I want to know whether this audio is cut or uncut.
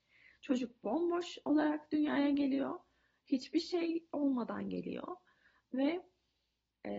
uncut